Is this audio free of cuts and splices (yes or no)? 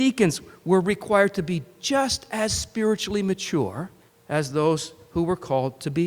no